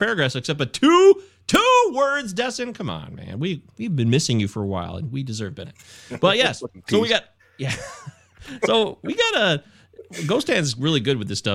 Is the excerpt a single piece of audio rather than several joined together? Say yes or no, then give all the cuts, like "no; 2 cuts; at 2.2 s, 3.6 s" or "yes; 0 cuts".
no; 2 cuts; at 5.6 s, 6.8 s